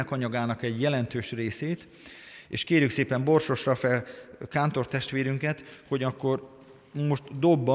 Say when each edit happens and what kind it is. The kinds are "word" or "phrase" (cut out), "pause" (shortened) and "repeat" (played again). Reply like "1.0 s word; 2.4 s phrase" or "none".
none